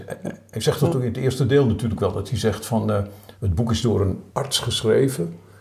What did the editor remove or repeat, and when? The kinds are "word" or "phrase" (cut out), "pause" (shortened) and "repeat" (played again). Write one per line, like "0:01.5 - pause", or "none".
0:03.3 - pause
0:04.3 - pause